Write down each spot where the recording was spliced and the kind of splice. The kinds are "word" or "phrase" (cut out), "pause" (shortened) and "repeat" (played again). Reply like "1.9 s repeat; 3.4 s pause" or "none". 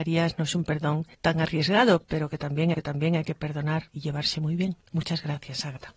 1.1 s pause; 2.7 s repeat; 4.8 s pause